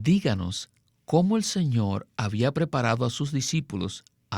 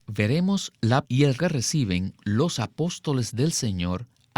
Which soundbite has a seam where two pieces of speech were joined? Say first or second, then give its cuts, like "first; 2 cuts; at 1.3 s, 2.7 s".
second; 2 cuts; at 1.0 s, 1.4 s